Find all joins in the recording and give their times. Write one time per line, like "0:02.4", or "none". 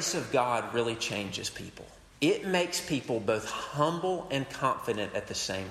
0:02.1